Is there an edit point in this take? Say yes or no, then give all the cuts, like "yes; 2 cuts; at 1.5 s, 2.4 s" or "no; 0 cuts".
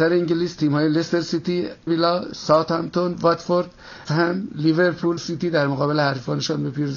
yes; 3 cuts; at 1.9 s, 4.1 s, 5.2 s